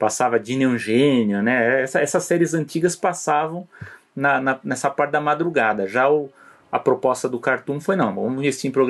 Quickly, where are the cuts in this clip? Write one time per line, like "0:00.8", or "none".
none